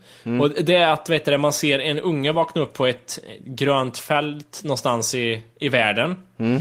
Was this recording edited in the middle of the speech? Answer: no; 0 cuts

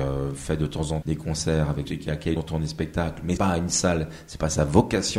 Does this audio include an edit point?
yes; 4 cuts; at 1.0 s, 1.8 s, 2.4 s, 3.4 s

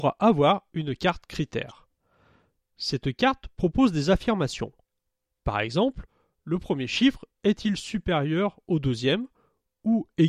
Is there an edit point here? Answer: no; 0 cuts

